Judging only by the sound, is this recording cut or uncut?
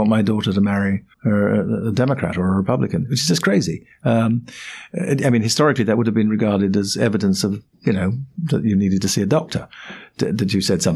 cut